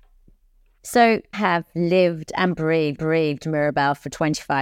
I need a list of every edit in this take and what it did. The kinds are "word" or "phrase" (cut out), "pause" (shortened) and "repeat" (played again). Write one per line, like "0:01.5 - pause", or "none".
0:01.3 - word
0:03.0 - repeat